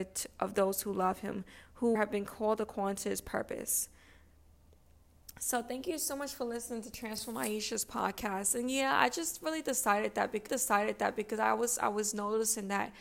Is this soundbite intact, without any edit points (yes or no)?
no